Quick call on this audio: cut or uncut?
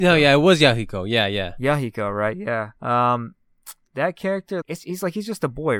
cut